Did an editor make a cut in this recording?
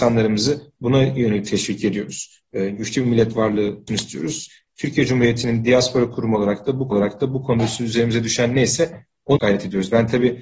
yes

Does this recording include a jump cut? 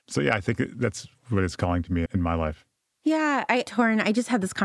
yes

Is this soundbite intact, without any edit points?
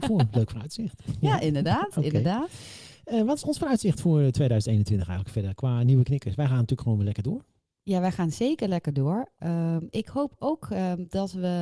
yes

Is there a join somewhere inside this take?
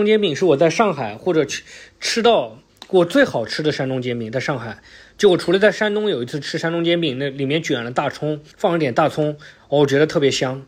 yes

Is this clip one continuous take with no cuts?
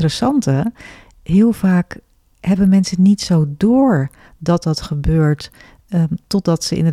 yes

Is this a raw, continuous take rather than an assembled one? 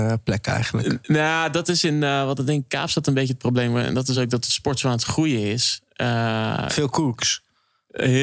yes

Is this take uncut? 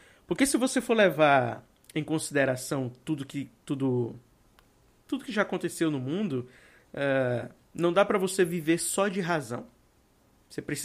yes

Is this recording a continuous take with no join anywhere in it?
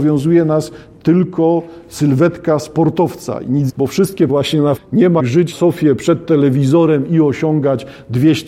no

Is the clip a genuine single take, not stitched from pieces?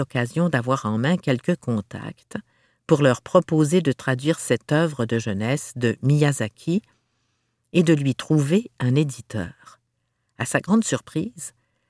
yes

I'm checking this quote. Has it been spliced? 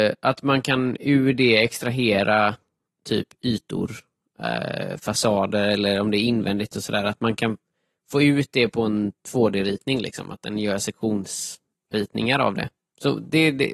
no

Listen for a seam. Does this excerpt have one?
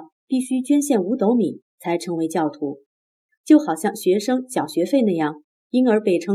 no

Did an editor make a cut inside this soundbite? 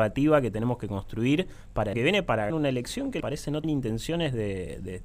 yes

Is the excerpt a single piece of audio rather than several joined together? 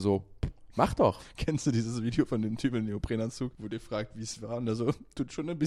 no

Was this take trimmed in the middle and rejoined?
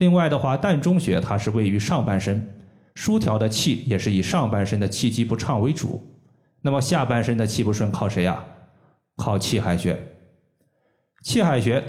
no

